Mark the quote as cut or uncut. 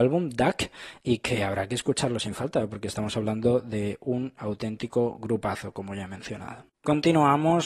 cut